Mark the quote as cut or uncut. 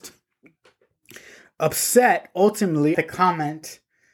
cut